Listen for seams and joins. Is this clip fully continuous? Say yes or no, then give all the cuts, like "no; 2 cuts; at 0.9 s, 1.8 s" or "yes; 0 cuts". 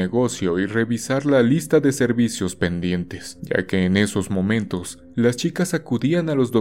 yes; 0 cuts